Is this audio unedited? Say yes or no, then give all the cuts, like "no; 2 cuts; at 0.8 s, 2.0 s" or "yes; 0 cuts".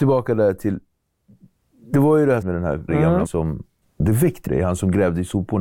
no; 5 cuts; at 2.4 s, 2.9 s, 3.2 s, 3.8 s, 4.5 s